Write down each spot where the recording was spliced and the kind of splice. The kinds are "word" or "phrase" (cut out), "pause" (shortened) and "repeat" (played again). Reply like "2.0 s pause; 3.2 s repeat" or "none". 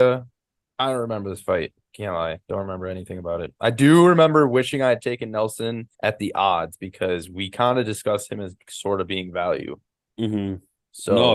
5.9 s pause